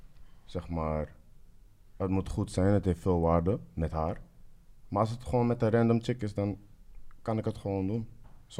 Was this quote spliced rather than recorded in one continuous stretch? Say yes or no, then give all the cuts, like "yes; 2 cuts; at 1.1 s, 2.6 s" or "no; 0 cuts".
no; 0 cuts